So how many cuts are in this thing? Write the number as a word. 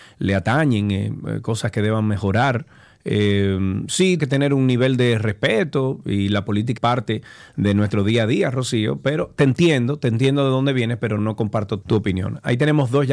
four